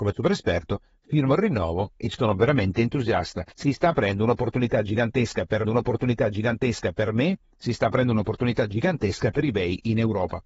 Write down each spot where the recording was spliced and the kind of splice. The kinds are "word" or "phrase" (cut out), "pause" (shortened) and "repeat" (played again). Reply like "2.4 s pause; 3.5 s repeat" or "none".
3.5 s pause; 5.6 s repeat